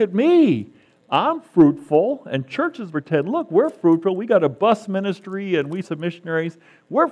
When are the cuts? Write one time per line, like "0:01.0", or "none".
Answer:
0:02.9
0:05.8